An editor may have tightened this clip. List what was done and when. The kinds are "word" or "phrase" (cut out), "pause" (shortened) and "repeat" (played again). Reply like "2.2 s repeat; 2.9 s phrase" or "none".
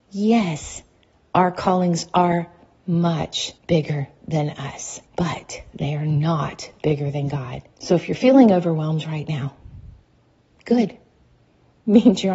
3.6 s pause; 5.1 s pause; 7.7 s pause